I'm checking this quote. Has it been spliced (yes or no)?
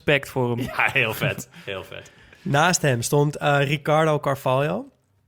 no